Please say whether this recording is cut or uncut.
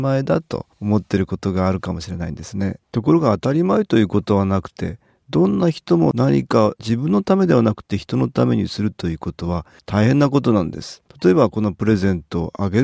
cut